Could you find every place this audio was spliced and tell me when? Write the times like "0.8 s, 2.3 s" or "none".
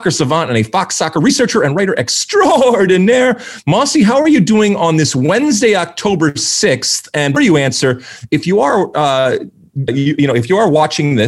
7.4 s, 9.9 s

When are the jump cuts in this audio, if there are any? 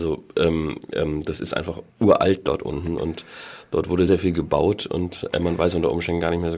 1.9 s, 4.1 s

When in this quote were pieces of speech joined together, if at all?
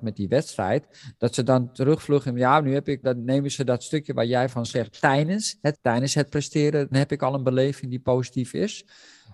3.0 s, 5.7 s, 6.9 s

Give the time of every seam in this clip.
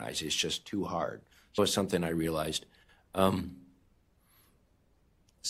1.6 s

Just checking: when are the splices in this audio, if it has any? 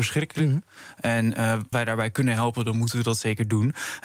1.7 s

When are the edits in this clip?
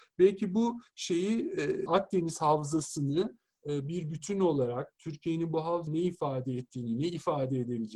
1.9 s, 5.9 s

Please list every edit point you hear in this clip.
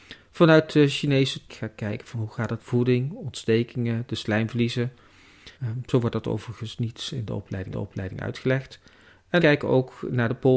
1.5 s, 2.6 s, 5.5 s, 7.7 s, 9.4 s

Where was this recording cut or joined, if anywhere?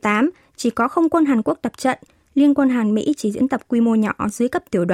none

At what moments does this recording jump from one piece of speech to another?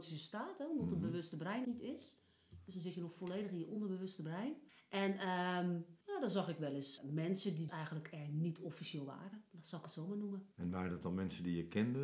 1.6 s, 4.7 s, 6.0 s, 7.0 s, 7.7 s, 10.5 s

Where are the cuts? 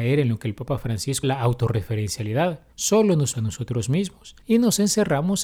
1.2 s, 2.7 s, 3.3 s, 4.4 s

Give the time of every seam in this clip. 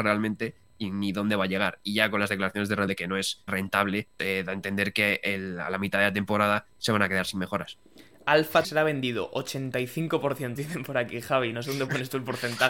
2.9 s, 3.5 s, 4.2 s, 8.6 s, 10.6 s

